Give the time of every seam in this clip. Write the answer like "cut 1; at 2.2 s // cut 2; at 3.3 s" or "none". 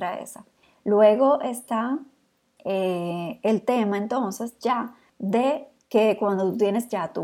none